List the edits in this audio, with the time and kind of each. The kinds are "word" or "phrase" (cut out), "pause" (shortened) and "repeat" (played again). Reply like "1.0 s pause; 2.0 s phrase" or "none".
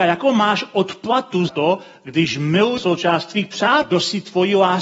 1.5 s word

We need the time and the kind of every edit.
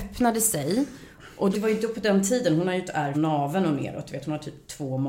1.5 s word; 3.1 s word

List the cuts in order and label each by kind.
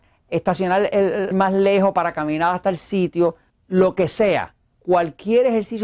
1.3 s word; 3.5 s pause

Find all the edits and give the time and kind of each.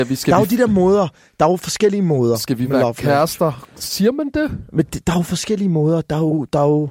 none

